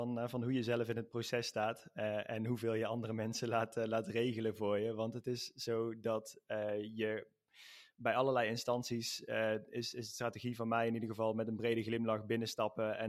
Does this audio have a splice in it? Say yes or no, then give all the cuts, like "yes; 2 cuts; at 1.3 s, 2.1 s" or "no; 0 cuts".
no; 0 cuts